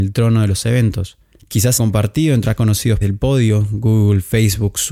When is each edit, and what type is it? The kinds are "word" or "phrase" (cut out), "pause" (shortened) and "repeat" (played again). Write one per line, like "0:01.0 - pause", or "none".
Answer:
0:01.8 - word
0:02.4 - word
0:03.0 - word